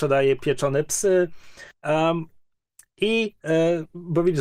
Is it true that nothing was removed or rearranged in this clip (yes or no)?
no